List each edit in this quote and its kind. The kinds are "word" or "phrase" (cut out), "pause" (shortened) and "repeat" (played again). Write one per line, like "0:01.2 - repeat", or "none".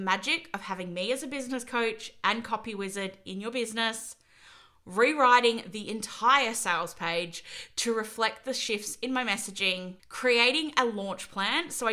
0:10.0 - pause